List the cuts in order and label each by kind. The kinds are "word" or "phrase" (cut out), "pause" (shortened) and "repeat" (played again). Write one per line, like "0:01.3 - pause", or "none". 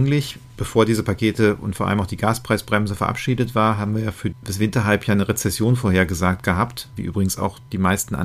none